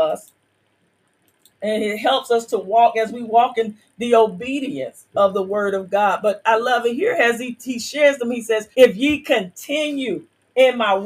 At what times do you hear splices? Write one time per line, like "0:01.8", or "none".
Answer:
0:08.7